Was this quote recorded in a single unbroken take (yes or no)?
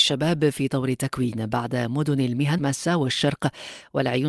no